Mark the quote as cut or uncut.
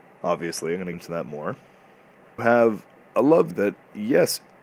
cut